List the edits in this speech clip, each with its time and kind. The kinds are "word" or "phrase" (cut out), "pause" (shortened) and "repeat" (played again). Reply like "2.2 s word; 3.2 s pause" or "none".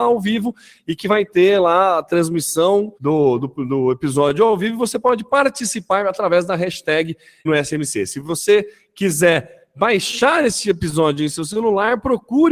3.0 s pause; 7.5 s word